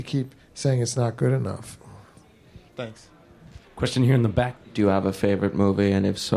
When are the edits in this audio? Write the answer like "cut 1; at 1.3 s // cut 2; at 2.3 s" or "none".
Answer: cut 1; at 3.6 s // cut 2; at 4.6 s